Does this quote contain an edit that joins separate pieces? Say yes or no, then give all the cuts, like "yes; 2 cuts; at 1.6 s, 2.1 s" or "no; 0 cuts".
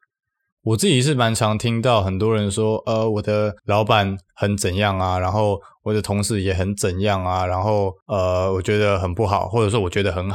yes; 2 cuts; at 3.6 s, 8.0 s